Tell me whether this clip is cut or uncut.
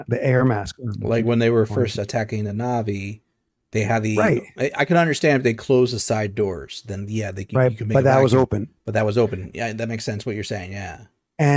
uncut